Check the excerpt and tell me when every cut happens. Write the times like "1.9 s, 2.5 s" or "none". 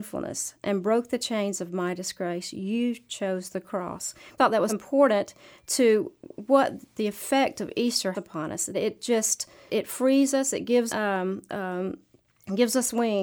4.4 s, 4.7 s, 8.1 s, 8.7 s, 9.7 s, 10.9 s